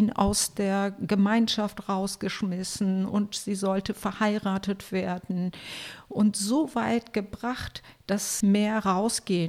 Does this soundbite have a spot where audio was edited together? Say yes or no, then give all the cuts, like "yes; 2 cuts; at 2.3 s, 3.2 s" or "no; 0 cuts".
yes; 1 cut; at 8.4 s